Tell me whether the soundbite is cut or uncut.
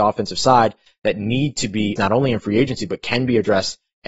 cut